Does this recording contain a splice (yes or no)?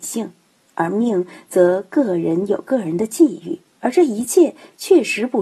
yes